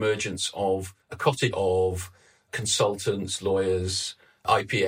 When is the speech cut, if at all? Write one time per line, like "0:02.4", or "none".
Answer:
0:01.0
0:01.5

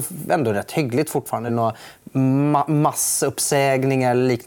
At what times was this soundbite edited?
0:01.5

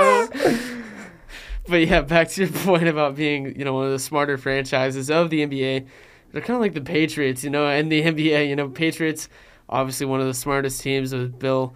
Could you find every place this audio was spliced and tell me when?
none

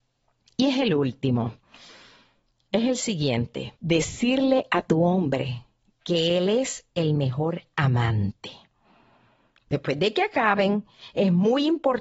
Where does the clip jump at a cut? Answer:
0:03.8

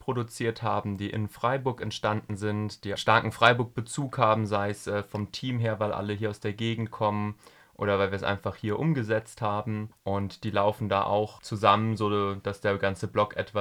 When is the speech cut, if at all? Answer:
0:03.0

